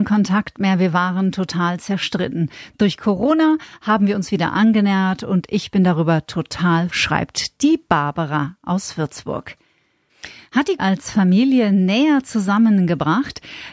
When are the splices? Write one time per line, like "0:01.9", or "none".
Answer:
0:06.9
0:10.8